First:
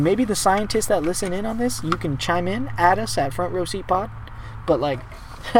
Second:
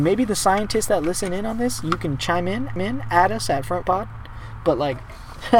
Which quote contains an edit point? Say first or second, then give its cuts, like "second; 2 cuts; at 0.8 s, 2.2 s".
second; 2 cuts; at 2.8 s, 3.8 s